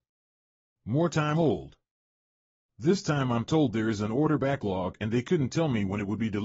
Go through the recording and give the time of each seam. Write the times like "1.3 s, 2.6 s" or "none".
1.3 s